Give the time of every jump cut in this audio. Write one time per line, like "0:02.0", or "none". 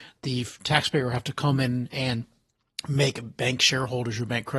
none